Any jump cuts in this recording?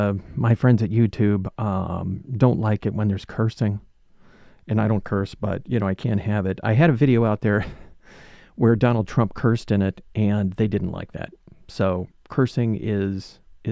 no; 0 cuts

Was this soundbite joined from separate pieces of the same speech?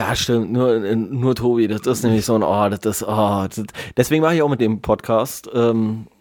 yes; 1 cut; at 4.6 s

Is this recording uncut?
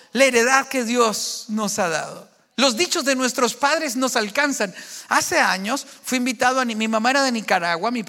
yes; 0 cuts

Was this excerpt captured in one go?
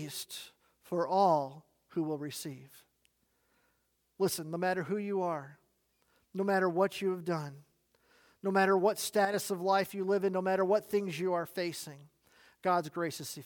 yes; 0 cuts

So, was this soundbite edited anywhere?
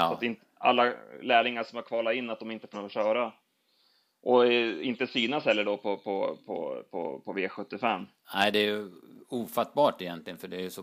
yes; 1 cut; at 2.7 s

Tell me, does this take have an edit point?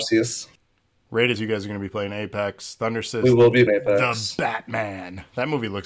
yes; 2 cuts; at 1.4 s, 3.7 s

